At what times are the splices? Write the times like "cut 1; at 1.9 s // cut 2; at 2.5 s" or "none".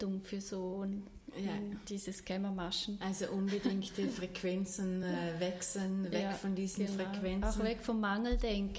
none